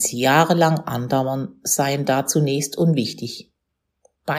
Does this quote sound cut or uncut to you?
uncut